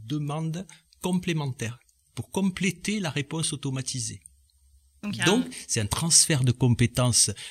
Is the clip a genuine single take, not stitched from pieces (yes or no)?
yes